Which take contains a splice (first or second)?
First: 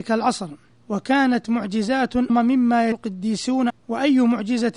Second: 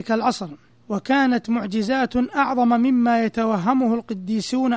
first